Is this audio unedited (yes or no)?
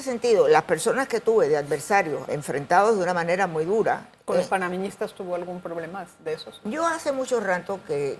no